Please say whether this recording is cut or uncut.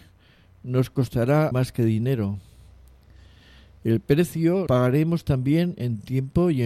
cut